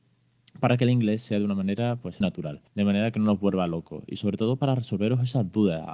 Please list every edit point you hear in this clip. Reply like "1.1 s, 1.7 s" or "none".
2.2 s, 2.7 s